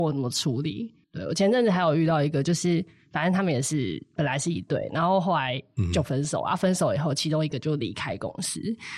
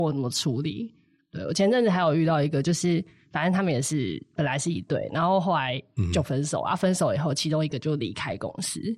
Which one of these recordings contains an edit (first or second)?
first